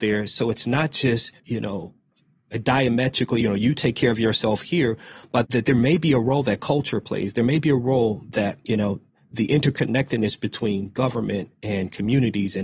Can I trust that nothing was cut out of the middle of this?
no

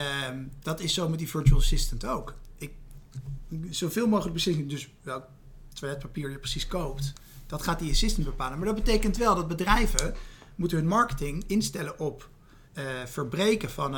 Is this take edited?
yes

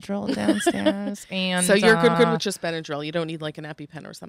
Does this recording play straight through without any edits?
no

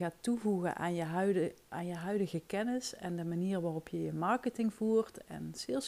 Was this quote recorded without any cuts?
yes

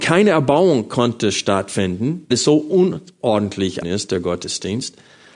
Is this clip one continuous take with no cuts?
no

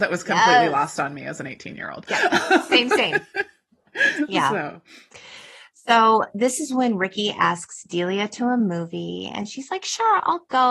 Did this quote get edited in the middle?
no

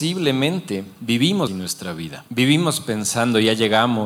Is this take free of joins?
no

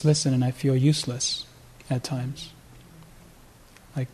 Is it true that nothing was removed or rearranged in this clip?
yes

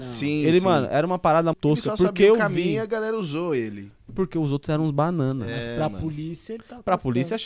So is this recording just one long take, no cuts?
no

